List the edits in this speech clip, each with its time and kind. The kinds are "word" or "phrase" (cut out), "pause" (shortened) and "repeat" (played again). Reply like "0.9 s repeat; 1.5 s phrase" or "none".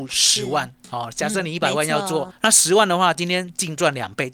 2.3 s word